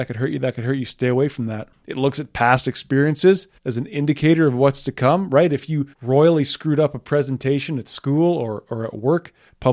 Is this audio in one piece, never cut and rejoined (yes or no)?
no